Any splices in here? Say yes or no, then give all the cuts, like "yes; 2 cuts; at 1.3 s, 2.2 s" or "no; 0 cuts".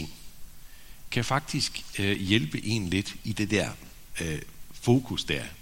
no; 0 cuts